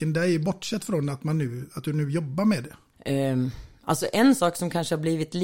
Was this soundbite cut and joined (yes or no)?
no